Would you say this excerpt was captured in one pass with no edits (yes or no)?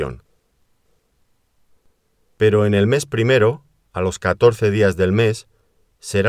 yes